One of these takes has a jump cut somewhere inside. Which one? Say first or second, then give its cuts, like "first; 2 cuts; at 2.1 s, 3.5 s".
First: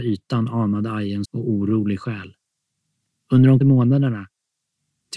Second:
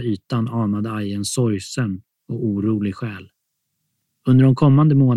first; 2 cuts; at 1.2 s, 3.6 s